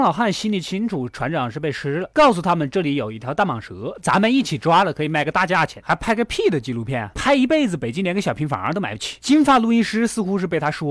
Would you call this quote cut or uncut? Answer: uncut